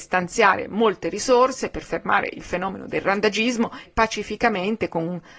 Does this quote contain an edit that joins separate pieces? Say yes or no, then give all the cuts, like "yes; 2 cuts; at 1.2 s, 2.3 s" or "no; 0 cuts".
yes; 1 cut; at 3.9 s